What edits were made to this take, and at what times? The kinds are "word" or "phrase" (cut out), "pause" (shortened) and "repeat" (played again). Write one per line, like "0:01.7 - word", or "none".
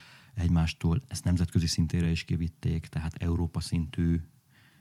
none